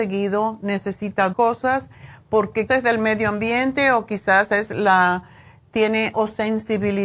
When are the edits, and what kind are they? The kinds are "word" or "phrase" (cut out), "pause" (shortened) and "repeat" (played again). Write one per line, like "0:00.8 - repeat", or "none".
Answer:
0:01.3 - word
0:02.7 - word
0:06.1 - word